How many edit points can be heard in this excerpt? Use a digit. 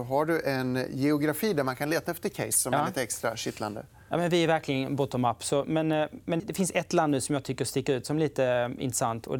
1